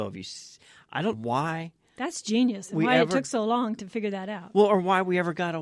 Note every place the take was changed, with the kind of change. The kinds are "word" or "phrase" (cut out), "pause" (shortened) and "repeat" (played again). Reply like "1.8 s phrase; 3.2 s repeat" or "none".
1.1 s word